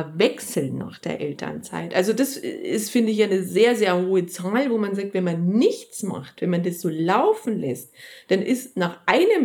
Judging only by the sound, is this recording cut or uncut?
uncut